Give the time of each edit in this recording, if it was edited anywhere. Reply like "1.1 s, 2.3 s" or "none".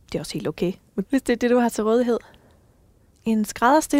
1.0 s